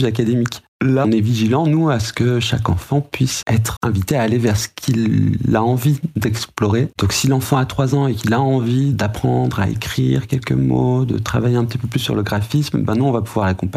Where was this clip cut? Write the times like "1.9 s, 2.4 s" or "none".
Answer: 1.0 s, 3.4 s, 3.8 s